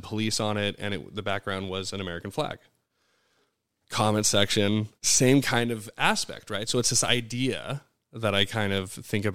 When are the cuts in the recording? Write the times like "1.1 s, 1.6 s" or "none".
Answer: 5.0 s